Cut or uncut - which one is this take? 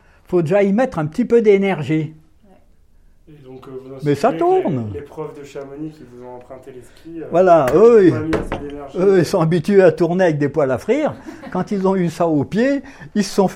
uncut